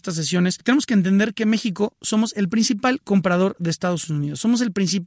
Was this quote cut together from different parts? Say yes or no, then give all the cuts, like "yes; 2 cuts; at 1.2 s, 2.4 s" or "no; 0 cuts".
no; 0 cuts